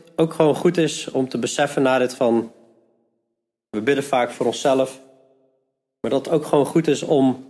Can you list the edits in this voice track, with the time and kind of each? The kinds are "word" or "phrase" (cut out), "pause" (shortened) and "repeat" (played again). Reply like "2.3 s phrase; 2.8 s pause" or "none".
2.1 s word